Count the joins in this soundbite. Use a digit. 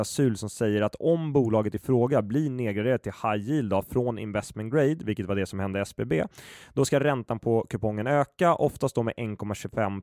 0